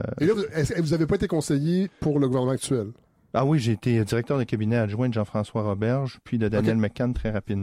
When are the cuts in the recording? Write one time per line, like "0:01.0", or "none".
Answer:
none